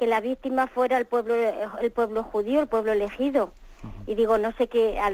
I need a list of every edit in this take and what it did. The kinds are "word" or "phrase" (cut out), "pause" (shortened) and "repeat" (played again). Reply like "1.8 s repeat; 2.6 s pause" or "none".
none